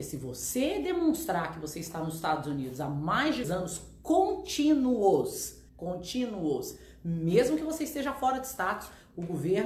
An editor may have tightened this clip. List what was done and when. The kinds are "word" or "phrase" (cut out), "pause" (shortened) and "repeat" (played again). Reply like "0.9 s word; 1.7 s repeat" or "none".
3.4 s word; 5.7 s pause